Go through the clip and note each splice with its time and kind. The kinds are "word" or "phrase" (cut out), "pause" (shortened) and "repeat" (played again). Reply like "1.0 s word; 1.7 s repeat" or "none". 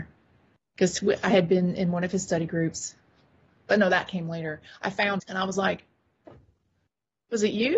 5.2 s word